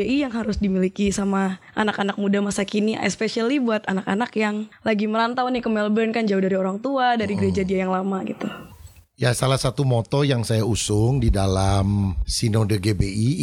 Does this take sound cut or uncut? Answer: uncut